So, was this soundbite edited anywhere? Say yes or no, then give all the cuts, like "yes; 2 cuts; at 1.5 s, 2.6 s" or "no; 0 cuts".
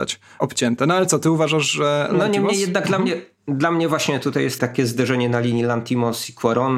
no; 0 cuts